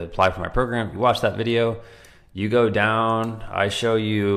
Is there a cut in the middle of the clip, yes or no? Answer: no